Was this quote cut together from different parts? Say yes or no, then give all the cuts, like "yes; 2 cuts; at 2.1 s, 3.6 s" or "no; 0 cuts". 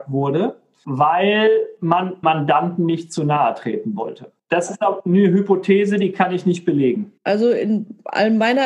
yes; 3 cuts; at 2.2 s, 4.4 s, 7.2 s